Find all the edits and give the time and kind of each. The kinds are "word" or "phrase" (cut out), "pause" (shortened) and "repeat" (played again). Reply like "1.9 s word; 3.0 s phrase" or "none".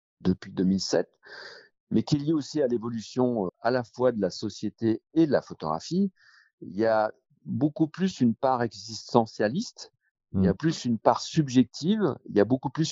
3.5 s word; 10.6 s word